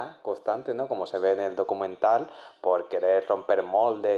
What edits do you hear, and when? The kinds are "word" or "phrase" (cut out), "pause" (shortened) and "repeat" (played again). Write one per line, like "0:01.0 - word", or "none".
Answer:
none